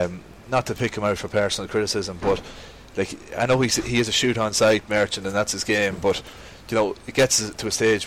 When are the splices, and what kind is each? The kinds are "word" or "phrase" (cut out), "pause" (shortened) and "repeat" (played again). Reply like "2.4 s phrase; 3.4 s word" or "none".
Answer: none